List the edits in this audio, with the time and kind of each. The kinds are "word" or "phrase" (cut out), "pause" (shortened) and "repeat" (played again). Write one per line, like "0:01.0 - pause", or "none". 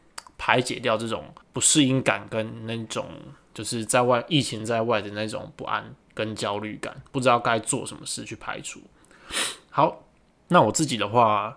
0:01.4 - pause
0:06.0 - pause
0:10.4 - pause